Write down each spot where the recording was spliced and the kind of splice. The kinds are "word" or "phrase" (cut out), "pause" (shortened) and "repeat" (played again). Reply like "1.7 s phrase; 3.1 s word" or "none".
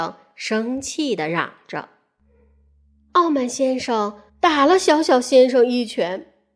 4.3 s pause